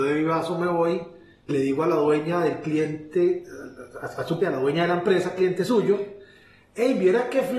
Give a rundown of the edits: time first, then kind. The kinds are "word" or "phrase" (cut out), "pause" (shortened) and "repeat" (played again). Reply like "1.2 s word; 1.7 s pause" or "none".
1.5 s word; 4.4 s word